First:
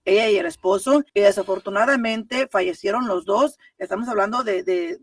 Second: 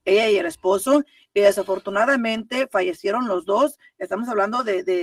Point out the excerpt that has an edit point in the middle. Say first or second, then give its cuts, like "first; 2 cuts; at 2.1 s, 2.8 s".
first; 1 cut; at 1.1 s